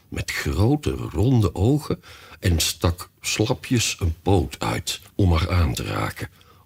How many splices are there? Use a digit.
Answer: 1